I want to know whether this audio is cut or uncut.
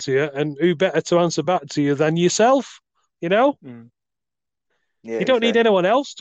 uncut